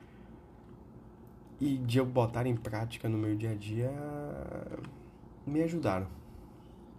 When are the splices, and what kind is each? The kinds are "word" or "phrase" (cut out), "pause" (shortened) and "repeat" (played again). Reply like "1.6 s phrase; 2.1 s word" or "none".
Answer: none